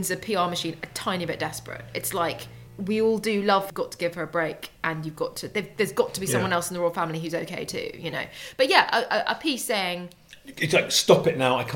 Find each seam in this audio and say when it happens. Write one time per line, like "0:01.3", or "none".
0:02.7
0:03.7